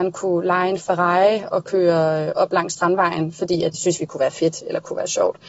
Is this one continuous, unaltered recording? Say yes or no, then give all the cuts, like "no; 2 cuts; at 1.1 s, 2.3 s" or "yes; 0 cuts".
no; 1 cut; at 3.7 s